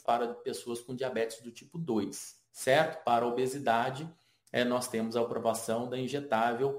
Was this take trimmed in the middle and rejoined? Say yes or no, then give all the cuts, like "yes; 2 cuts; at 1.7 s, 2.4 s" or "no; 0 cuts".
no; 0 cuts